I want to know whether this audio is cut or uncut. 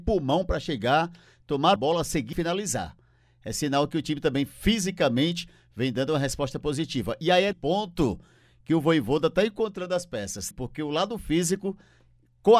cut